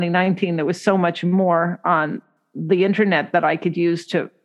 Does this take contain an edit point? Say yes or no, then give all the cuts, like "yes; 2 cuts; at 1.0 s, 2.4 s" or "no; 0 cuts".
no; 0 cuts